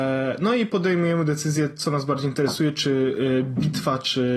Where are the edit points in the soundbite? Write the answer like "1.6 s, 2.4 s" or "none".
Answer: none